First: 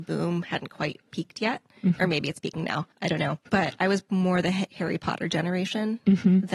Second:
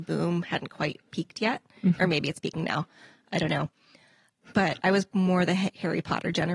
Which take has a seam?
first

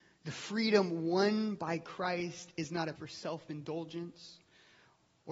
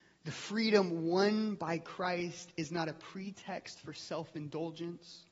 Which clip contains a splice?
first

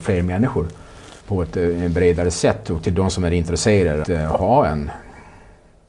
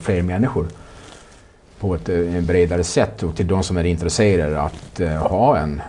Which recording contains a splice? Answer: first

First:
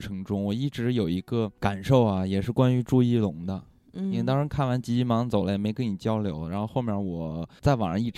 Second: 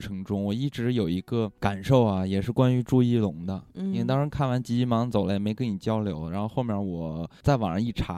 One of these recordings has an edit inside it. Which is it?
second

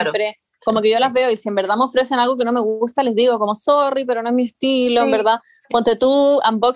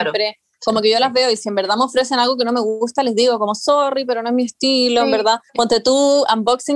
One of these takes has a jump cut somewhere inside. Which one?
second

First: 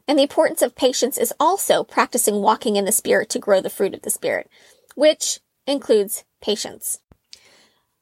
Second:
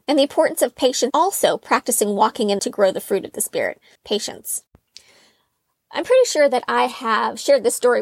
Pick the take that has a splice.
second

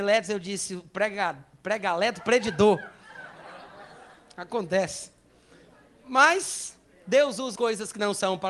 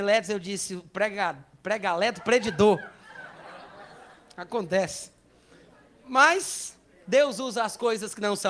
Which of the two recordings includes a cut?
first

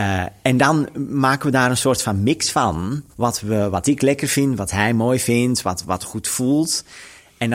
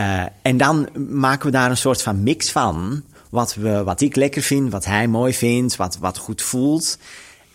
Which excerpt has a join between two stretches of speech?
first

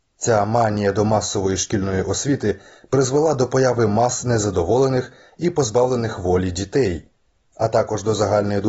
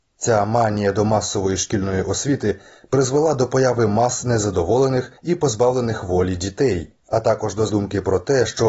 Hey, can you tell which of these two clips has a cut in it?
second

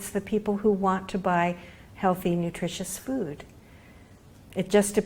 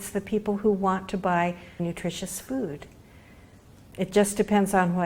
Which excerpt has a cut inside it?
second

